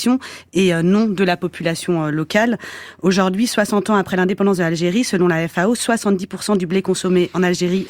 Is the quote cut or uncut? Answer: uncut